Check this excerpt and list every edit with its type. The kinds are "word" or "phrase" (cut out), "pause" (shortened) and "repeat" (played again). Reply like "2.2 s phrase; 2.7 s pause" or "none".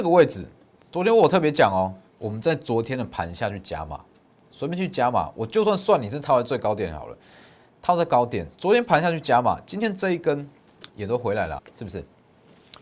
2.1 s pause; 11.6 s word